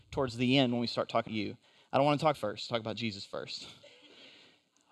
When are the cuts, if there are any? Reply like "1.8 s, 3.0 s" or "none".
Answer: 1.3 s, 2.3 s, 2.7 s